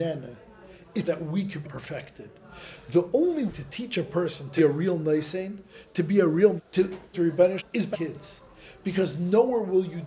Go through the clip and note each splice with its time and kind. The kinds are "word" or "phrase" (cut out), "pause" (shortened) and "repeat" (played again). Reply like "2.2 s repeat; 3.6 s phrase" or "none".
1.1 s word; 1.6 s word; 3.5 s word; 4.6 s word; 6.6 s word; 7.1 s word; 7.6 s word; 7.9 s word